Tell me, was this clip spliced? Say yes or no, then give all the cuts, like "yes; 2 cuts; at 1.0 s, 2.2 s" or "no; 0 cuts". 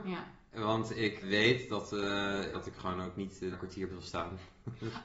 yes; 4 cuts; at 1.2 s, 2.5 s, 3.5 s, 3.9 s